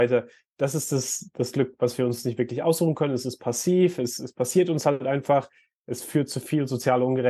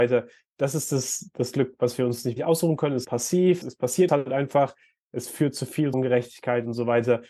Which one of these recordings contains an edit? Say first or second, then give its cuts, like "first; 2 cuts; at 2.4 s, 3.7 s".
second; 5 cuts; at 2.4 s, 3.0 s, 3.6 s, 4.1 s, 5.9 s